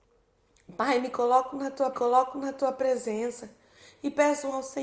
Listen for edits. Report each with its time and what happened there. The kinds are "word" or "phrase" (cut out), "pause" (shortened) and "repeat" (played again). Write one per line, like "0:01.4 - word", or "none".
0:01.9 - repeat